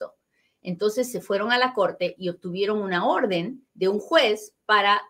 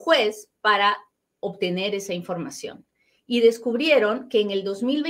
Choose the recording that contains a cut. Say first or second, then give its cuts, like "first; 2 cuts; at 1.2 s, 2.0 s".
first; 1 cut; at 3.7 s